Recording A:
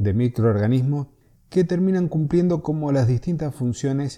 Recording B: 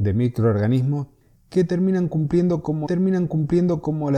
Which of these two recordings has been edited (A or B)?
B